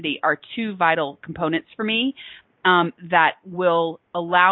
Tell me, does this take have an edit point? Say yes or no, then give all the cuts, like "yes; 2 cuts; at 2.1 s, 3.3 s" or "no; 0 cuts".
no; 0 cuts